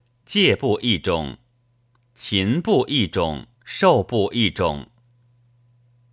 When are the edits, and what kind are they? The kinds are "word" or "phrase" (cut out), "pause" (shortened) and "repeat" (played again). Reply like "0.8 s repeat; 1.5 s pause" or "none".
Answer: 3.5 s pause